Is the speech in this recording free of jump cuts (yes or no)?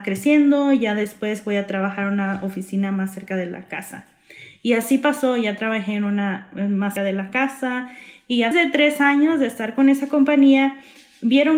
no